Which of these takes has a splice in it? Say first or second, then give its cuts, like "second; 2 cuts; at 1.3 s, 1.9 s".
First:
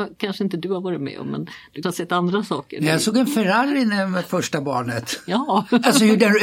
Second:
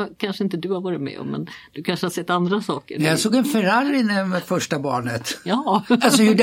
first; 1 cut; at 1.8 s